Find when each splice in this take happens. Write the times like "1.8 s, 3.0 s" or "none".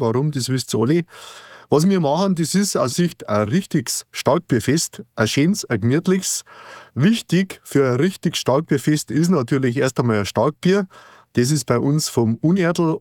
2.9 s